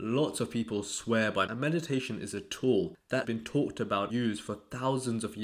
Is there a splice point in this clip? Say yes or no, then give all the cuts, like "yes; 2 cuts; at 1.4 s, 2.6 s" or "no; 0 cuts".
yes; 3 cuts; at 1.5 s, 3.2 s, 4.1 s